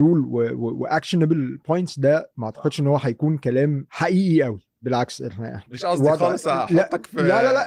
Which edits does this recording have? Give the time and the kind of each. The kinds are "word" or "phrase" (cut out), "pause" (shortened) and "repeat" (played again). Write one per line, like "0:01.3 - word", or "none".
none